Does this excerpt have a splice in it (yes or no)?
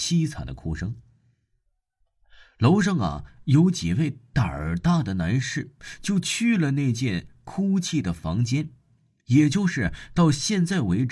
no